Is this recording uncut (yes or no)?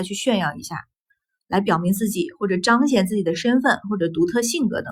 yes